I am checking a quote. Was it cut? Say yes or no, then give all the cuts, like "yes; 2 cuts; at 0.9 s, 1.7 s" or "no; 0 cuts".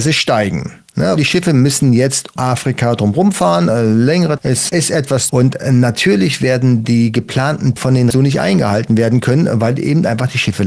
yes; 7 cuts; at 1.2 s, 2.4 s, 4.4 s, 4.7 s, 5.3 s, 7.8 s, 8.1 s